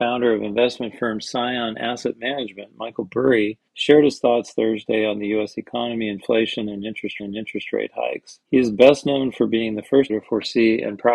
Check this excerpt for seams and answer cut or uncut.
cut